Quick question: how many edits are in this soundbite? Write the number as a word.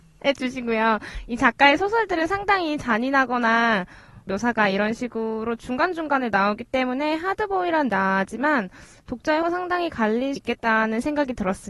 four